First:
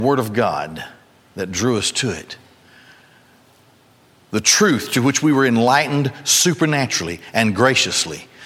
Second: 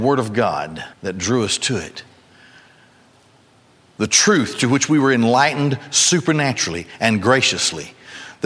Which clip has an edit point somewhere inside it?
second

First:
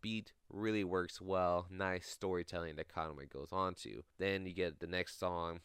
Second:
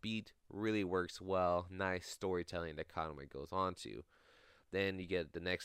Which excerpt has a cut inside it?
first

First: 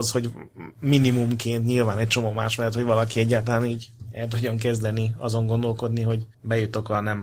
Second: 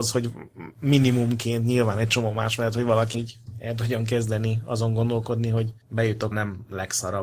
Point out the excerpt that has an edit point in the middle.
second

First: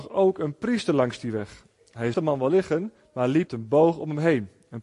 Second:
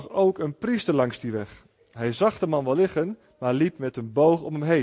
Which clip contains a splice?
first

